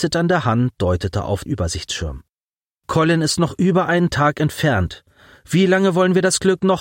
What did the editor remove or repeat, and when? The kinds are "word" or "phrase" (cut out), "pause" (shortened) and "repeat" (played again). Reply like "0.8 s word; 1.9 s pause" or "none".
1.5 s word